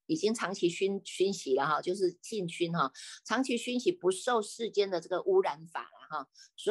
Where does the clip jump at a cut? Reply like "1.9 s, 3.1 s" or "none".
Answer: none